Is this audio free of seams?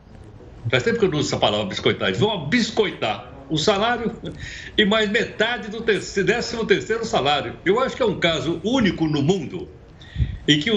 yes; 0 cuts

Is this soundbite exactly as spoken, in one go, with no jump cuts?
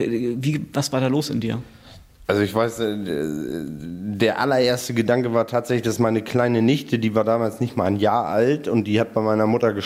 yes; 0 cuts

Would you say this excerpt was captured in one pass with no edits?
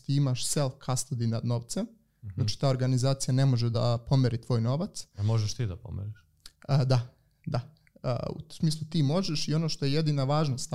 yes; 0 cuts

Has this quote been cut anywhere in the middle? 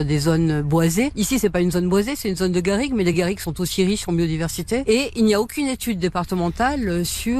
no; 0 cuts

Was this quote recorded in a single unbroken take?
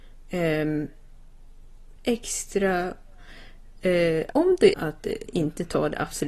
no; 4 cuts; at 2.0 s, 4.3 s, 4.7 s, 5.3 s

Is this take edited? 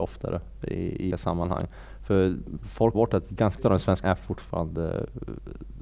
yes; 4 cuts; at 1.1 s, 2.9 s, 3.6 s, 4.0 s

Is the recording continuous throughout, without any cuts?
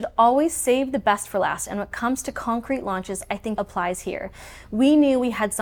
no; 1 cut; at 3.6 s

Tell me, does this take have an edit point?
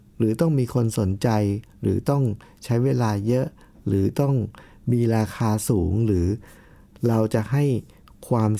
no; 0 cuts

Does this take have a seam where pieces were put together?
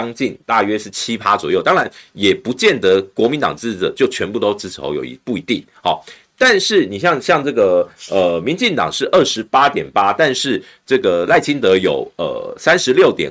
no; 0 cuts

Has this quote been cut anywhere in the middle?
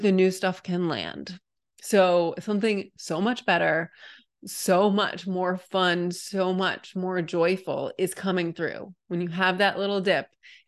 no; 0 cuts

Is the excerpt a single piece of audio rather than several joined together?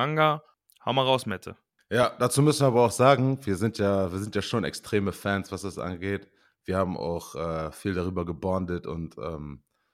yes; 0 cuts

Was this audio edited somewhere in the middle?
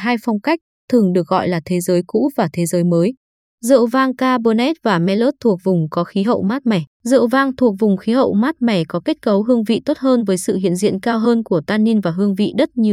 yes; 1 cut; at 6.9 s

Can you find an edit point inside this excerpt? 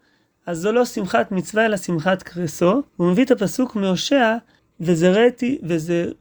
yes; 2 cuts; at 2.9 s, 4.6 s

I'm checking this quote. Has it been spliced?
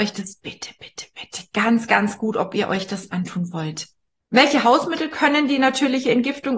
yes; 1 cut; at 4.1 s

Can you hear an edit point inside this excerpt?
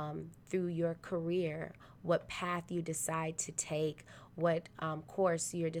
no; 0 cuts

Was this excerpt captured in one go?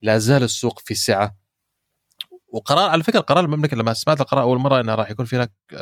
no; 1 cut; at 4.8 s

